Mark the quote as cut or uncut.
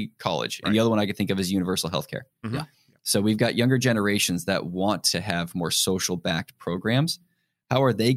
uncut